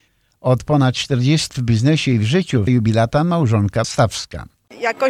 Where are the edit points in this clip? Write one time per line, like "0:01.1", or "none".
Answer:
0:01.5
0:02.7
0:03.8